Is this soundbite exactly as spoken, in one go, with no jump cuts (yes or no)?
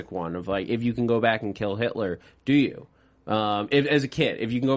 yes